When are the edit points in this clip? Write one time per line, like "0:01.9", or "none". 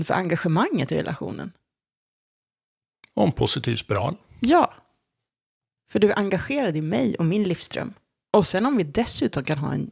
none